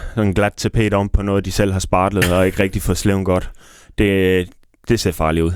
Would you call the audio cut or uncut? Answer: uncut